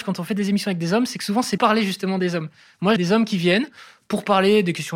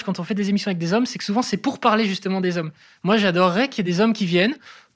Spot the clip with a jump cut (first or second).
first